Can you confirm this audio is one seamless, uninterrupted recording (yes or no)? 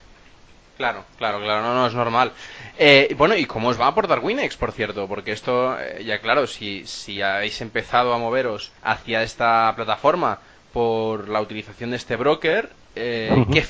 no